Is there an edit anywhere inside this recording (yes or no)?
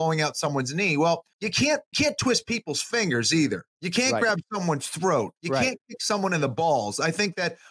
yes